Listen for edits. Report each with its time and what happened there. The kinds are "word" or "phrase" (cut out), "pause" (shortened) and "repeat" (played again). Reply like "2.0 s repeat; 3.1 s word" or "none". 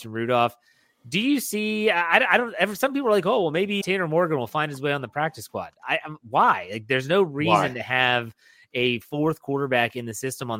3.8 s word

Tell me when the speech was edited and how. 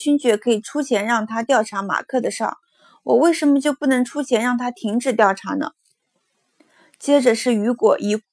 none

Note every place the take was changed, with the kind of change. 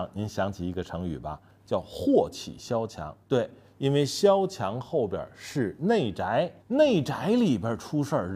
3.2 s pause; 6.6 s pause

